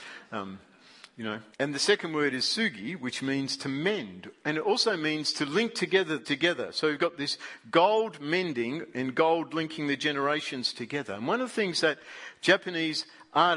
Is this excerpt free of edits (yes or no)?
no